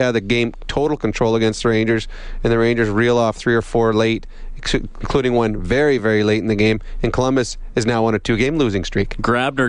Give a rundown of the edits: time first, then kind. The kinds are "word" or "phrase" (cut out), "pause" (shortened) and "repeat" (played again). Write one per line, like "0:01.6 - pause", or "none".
none